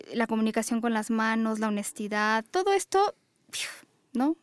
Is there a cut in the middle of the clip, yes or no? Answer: no